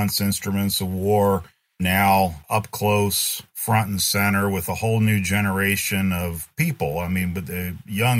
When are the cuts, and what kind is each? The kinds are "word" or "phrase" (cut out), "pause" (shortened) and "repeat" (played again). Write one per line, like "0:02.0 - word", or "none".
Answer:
none